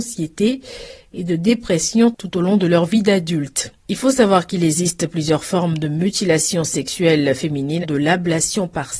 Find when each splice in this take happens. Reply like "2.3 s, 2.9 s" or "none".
7.8 s